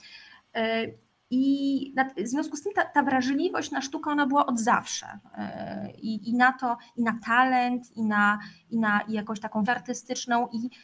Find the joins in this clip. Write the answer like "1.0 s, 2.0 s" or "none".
9.7 s